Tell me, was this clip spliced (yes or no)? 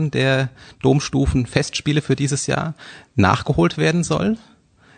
no